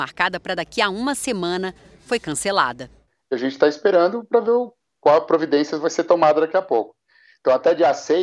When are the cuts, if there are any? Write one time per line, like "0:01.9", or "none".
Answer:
none